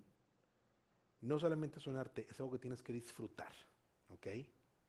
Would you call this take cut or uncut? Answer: uncut